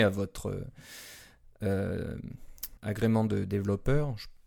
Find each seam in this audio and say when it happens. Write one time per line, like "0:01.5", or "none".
0:02.8